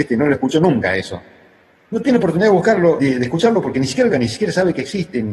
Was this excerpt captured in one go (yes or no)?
no